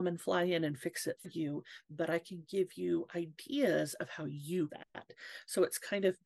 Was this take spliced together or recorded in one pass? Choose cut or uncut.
cut